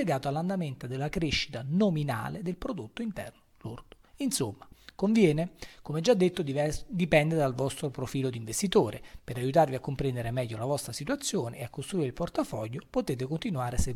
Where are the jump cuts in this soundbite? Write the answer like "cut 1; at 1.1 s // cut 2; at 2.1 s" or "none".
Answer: none